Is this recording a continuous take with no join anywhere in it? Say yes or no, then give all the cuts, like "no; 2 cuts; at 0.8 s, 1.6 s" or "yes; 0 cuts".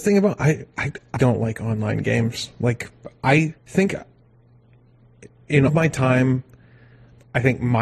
no; 3 cuts; at 1.2 s, 3.6 s, 5.7 s